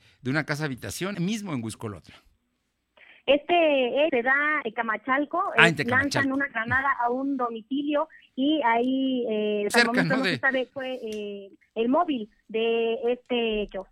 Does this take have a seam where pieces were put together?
yes; 5 cuts; at 1.1 s, 4.1 s, 4.6 s, 9.7 s, 10.7 s

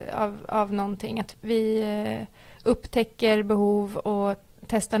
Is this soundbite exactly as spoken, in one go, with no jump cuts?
yes; 0 cuts

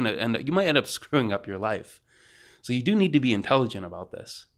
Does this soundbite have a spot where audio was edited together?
no; 0 cuts

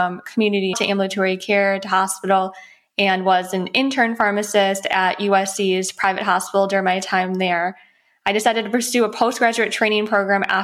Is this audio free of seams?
yes; 0 cuts

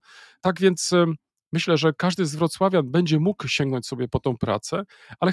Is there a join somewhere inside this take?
no; 0 cuts

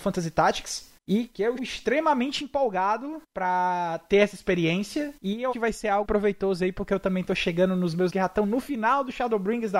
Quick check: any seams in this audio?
yes; 7 cuts; at 1.0 s, 1.6 s, 3.2 s, 5.2 s, 5.5 s, 6.0 s, 8.1 s

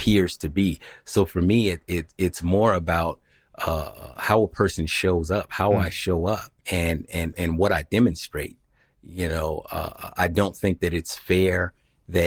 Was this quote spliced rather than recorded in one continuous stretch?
yes; 2 cuts; at 6.6 s, 7.3 s

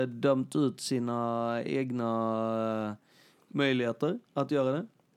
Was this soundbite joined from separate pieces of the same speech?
no; 0 cuts

